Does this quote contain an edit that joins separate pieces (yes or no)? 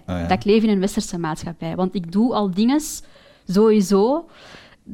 no